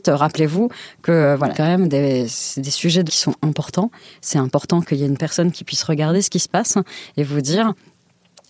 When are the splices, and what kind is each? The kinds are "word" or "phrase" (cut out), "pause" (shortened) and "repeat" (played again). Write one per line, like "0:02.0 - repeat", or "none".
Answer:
0:01.5 - word
0:03.1 - word

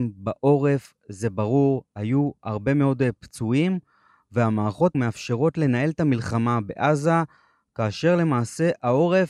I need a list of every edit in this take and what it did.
0:04.9 - word

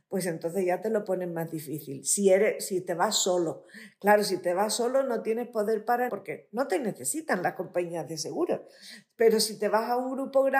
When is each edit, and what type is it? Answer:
0:06.1 - word

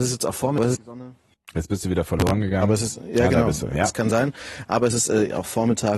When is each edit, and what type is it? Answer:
none

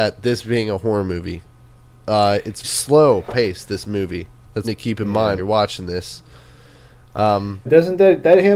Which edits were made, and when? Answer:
0:02.6 - word
0:04.6 - word
0:05.4 - word
0:07.7 - word

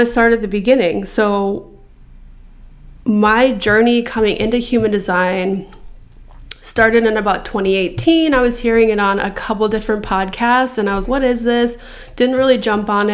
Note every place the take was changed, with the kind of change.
0:11.0 - word

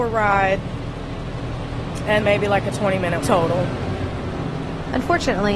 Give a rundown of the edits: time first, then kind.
0:02.2 - word
0:03.2 - word

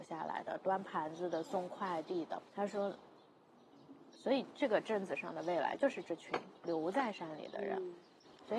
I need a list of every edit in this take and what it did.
0:02.5 - pause

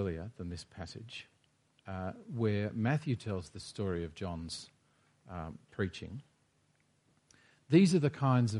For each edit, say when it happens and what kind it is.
none

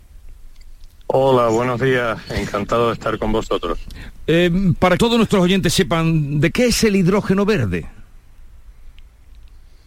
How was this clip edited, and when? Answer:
0:05.0 - word
0:06.5 - phrase

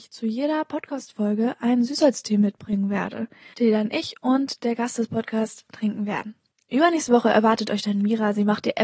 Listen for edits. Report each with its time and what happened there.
none

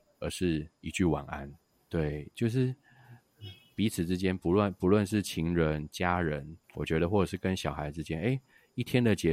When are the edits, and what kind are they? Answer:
0:06.6 - pause

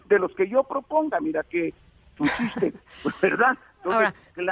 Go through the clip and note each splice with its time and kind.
none

